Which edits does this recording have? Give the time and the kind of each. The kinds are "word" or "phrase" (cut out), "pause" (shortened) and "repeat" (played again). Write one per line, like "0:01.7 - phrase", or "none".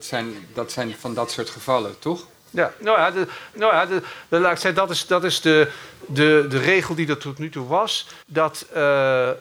0:03.5 - repeat
0:08.2 - pause